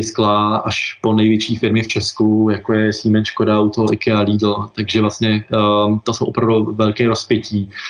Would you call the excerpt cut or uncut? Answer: uncut